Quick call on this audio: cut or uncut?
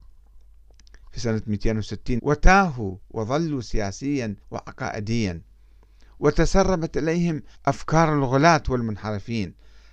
cut